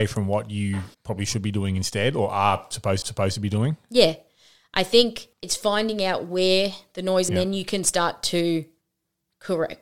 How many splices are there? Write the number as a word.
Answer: four